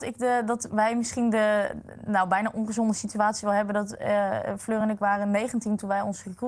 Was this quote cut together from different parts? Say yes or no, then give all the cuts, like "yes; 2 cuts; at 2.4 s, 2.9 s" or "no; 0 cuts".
no; 0 cuts